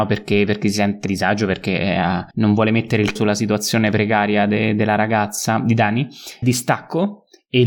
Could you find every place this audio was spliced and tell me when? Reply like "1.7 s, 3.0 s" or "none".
1.1 s, 2.3 s, 3.2 s, 6.4 s